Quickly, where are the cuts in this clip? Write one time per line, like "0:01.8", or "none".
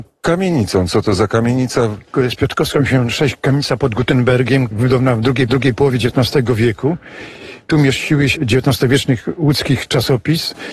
0:02.1
0:04.7
0:05.5
0:08.4